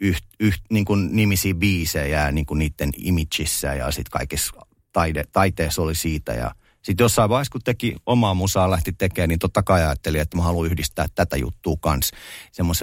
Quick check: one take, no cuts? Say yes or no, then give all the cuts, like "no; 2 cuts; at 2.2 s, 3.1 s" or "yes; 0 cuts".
yes; 0 cuts